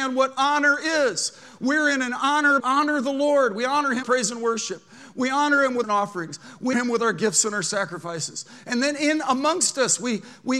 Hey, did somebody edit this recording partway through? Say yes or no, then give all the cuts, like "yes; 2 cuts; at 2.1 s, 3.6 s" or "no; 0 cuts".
yes; 4 cuts; at 2.6 s, 4.0 s, 5.8 s, 6.7 s